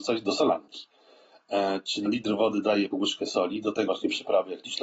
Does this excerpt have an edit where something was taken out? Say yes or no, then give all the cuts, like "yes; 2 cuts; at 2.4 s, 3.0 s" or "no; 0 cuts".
yes; 3 cuts; at 2.1 s, 2.9 s, 3.9 s